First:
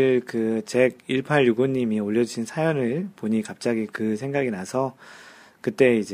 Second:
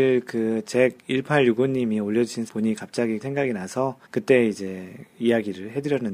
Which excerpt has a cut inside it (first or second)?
second